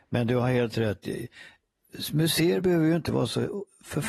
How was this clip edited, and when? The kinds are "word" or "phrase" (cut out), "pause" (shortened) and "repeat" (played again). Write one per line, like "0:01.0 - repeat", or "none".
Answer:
none